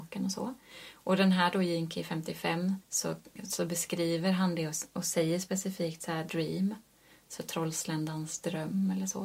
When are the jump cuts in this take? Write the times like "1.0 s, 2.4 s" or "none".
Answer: 2.8 s, 6.3 s